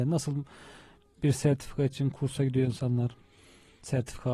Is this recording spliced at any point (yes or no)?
no